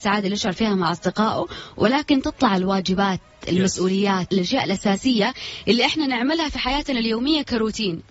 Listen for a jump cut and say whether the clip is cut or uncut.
cut